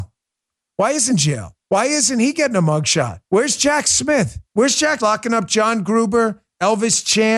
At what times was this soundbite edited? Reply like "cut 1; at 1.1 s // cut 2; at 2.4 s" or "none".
cut 1; at 1.1 s // cut 2; at 1.6 s // cut 3; at 3.2 s // cut 4; at 4.4 s // cut 5; at 5.0 s